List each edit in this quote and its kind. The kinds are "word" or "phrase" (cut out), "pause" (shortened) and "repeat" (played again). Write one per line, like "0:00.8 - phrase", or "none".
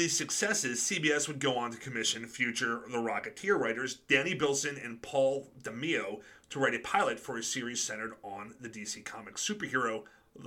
none

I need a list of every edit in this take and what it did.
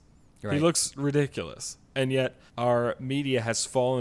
0:02.5 - pause

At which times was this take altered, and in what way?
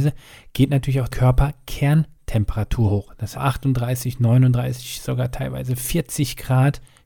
0:01.1 - word
0:03.3 - phrase

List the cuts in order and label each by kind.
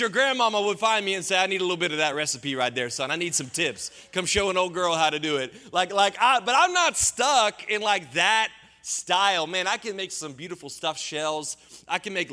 none

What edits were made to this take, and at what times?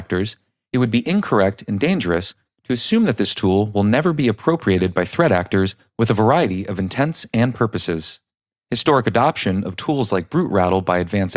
none

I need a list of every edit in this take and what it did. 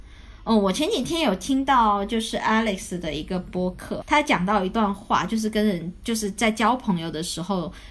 0:04.0 - word

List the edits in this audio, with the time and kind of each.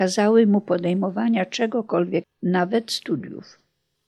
0:02.2 - word

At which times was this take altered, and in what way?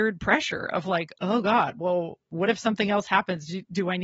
0:02.2 - pause

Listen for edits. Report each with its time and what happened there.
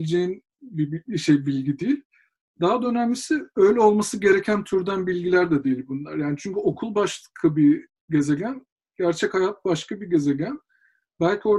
none

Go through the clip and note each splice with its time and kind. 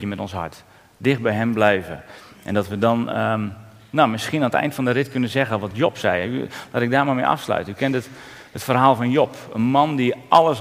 none

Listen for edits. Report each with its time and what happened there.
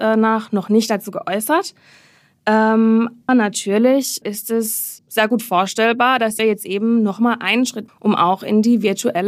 0:03.3 - word
0:04.2 - word
0:05.0 - word
0:06.4 - word
0:07.9 - word

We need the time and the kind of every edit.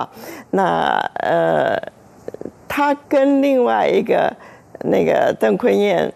0:03.0 - pause

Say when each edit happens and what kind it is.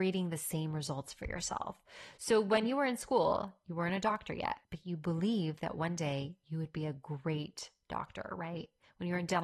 0:04.6 - pause

